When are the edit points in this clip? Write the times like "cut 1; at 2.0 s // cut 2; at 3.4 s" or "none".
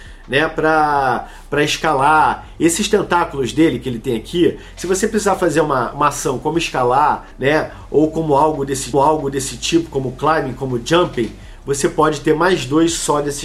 cut 1; at 5.9 s // cut 2; at 7.3 s // cut 3; at 8.9 s